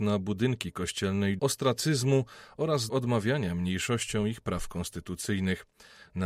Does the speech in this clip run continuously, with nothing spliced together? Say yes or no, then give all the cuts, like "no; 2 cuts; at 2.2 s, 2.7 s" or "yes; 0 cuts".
no; 2 cuts; at 1.4 s, 2.9 s